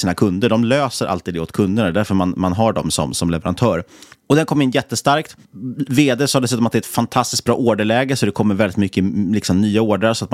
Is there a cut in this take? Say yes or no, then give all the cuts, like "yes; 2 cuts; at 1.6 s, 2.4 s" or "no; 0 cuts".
no; 0 cuts